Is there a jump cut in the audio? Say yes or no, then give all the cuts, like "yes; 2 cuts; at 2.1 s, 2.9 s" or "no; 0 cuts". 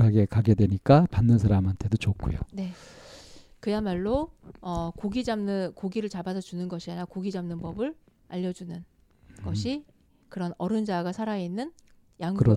no; 0 cuts